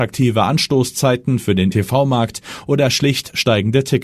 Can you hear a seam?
yes; 1 cut; at 1.7 s

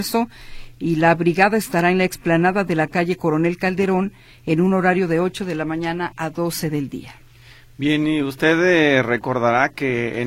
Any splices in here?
no; 0 cuts

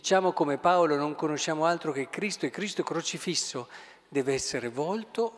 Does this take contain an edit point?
no; 0 cuts

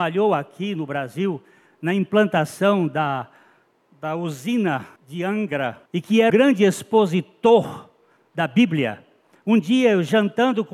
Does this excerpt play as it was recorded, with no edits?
no; 3 cuts; at 5.0 s, 5.9 s, 6.3 s

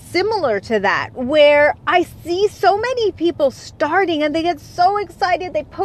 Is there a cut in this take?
no; 0 cuts

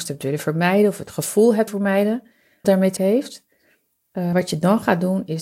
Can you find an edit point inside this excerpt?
yes; 4 cuts; at 1.7 s, 2.6 s, 3.0 s, 4.3 s

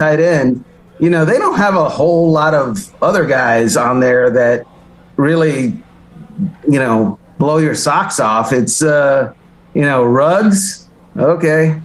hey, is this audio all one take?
yes; 0 cuts

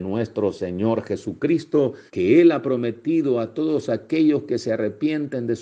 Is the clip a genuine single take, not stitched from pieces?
no; 1 cut; at 2.1 s

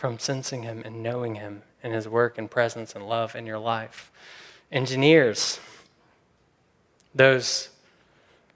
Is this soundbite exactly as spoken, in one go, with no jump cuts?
yes; 0 cuts

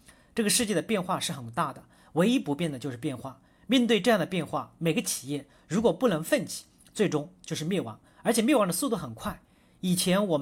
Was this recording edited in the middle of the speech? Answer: no; 0 cuts

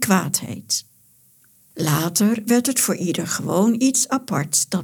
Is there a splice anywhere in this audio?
no; 0 cuts

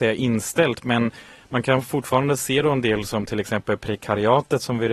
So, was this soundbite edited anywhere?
no; 0 cuts

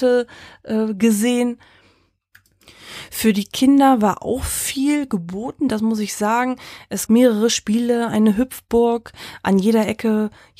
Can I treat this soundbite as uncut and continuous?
no; 1 cut; at 7.1 s

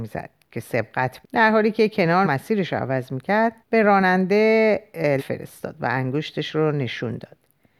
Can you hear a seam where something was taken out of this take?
yes; 4 cuts; at 1.2 s, 2.2 s, 3.6 s, 5.2 s

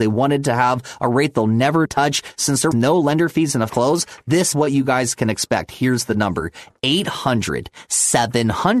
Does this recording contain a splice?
yes; 4 cuts; at 1.9 s, 2.7 s, 3.7 s, 4.5 s

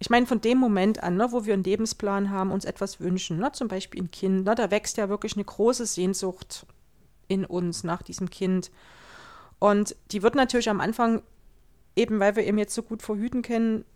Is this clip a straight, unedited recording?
yes; 0 cuts

